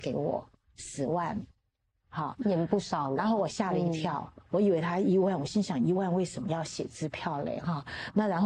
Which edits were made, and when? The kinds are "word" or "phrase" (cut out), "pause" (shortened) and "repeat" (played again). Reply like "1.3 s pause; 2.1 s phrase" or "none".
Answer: none